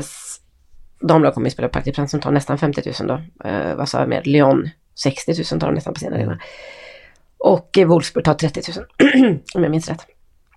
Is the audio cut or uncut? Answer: uncut